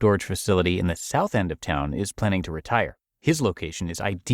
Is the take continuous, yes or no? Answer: yes